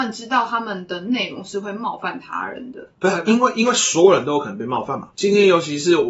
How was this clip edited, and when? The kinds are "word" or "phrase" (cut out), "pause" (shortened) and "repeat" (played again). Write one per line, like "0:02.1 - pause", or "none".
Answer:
0:02.9 - pause
0:05.1 - pause